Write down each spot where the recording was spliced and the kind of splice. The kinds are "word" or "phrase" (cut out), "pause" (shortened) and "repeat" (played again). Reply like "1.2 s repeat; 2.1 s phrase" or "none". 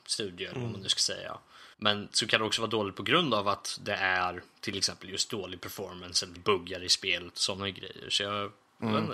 1.7 s pause; 6.4 s phrase

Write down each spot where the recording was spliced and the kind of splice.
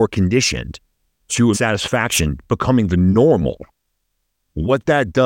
1.5 s word

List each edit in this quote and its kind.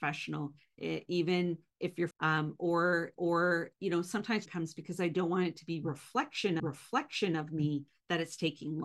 2.1 s word; 3.2 s repeat; 4.5 s phrase; 6.6 s repeat

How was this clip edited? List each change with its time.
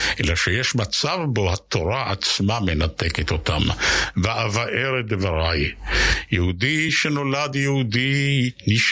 none

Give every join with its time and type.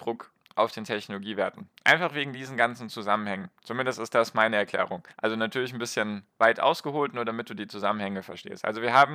5.1 s pause

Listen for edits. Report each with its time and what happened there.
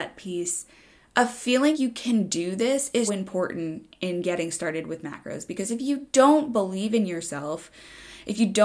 1.7 s word; 3.1 s word

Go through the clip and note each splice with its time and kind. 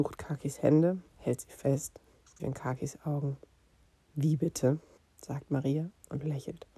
1.1 s pause; 2.4 s phrase; 5.0 s pause

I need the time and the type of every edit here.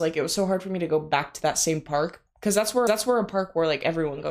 2.9 s repeat

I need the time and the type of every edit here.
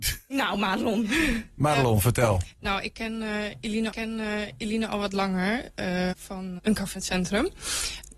3.9 s repeat; 6.1 s word; 6.6 s word; 7.0 s word

